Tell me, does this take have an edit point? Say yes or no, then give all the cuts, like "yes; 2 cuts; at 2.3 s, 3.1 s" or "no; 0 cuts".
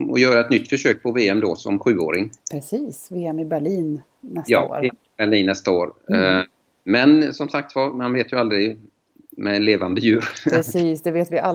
no; 0 cuts